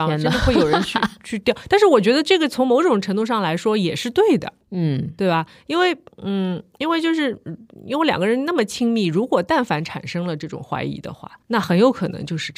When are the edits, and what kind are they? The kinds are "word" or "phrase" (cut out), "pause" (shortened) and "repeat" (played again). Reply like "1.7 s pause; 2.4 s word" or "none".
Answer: 4.6 s pause; 11.4 s pause

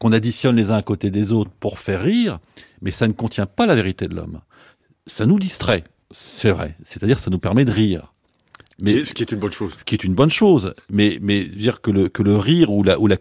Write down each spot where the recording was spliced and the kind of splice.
none

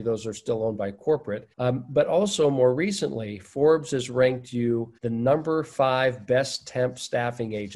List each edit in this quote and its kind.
1.5 s pause; 5.0 s pause

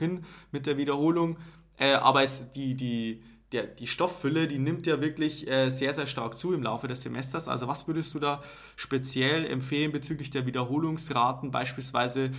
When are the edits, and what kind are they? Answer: none

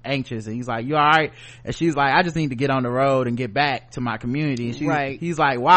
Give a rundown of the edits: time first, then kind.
none

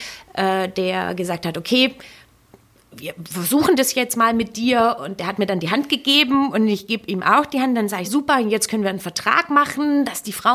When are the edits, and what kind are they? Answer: 8.0 s word

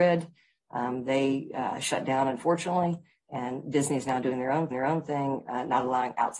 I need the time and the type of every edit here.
4.7 s repeat

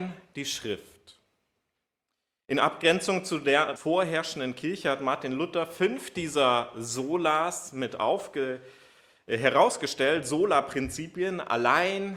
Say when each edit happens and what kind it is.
3.8 s word

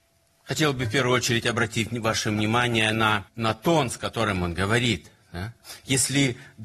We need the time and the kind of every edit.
3.3 s pause

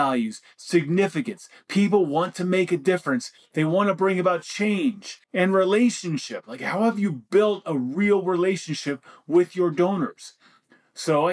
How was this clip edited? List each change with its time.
5.2 s pause

